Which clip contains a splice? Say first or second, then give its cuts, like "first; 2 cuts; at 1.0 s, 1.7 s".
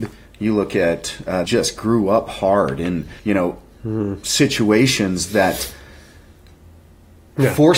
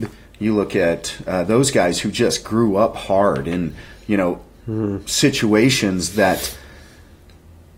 first; 2 cuts; at 1.5 s, 3.2 s